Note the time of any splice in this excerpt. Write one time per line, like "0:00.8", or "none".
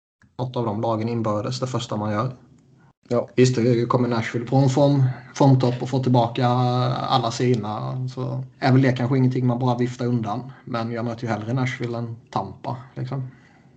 0:03.3
0:08.5